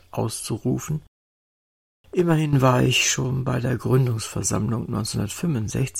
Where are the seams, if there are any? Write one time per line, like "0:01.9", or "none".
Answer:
none